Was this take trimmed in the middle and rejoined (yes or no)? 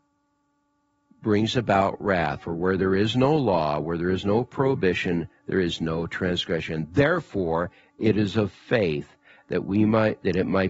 no